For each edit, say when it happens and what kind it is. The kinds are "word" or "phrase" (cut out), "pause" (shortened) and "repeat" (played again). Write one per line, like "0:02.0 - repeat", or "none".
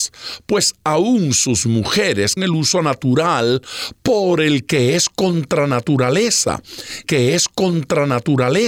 0:02.4 - word
0:07.0 - repeat